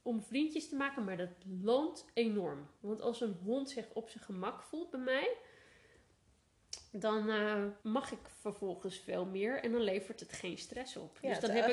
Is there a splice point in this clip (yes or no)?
yes